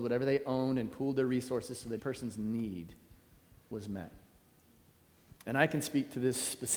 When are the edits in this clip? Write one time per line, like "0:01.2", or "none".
0:02.0

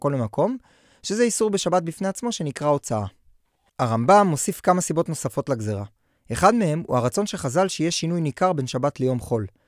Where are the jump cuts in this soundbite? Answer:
none

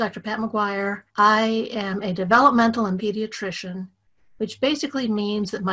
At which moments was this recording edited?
0:01.1
0:03.0

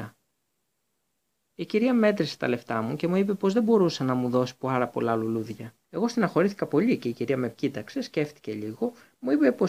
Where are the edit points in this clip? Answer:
0:05.8

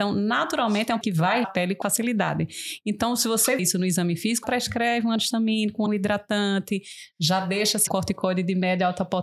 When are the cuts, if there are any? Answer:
0:01.0
0:01.4
0:01.8
0:03.6
0:04.4
0:05.9
0:07.9

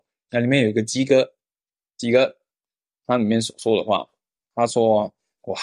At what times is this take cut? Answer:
none

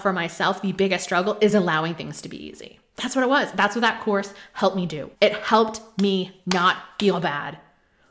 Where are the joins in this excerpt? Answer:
0:05.1

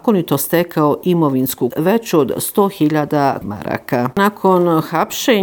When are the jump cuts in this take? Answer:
0:01.7
0:03.4

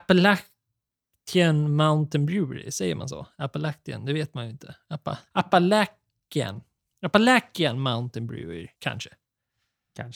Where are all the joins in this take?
0:05.3
0:08.7

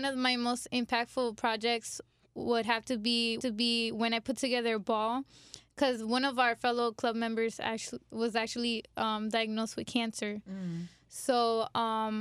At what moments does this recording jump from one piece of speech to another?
0:03.4

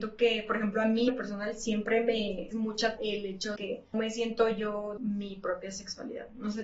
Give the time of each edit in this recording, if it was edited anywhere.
0:01.1
0:02.5
0:03.0
0:03.6
0:03.9
0:05.0

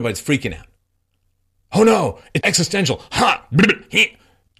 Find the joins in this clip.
0:02.4

